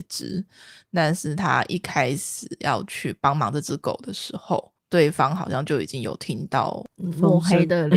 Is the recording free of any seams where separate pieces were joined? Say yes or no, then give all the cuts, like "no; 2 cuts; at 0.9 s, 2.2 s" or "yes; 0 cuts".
no; 1 cut; at 4.8 s